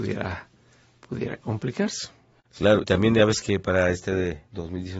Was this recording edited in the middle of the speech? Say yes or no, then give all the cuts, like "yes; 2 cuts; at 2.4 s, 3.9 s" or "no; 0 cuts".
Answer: yes; 1 cut; at 2.8 s